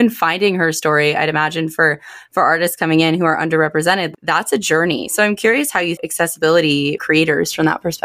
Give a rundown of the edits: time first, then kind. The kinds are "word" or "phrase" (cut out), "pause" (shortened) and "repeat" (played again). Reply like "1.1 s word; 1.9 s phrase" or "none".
6.0 s phrase; 7.0 s word